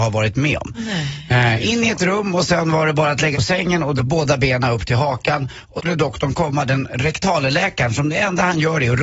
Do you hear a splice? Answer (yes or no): yes